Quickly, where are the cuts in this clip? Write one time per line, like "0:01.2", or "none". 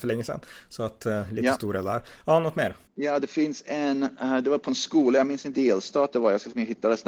0:02.9
0:05.5